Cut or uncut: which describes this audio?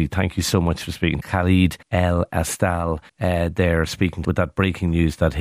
cut